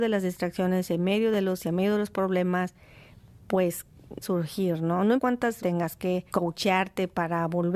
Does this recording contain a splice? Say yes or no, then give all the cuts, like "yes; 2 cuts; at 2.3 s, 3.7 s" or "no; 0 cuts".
yes; 5 cuts; at 1.6 s, 4.2 s, 5.2 s, 5.6 s, 6.3 s